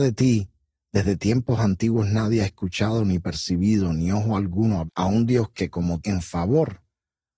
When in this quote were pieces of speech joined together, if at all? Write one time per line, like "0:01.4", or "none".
0:04.9
0:06.0